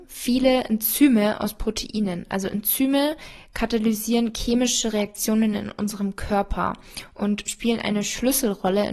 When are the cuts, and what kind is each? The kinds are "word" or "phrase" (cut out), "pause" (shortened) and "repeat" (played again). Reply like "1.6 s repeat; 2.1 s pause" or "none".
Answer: none